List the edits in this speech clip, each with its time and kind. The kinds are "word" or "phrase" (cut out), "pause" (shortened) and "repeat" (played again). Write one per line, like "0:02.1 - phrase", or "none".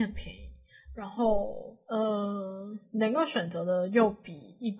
0:01.8 - pause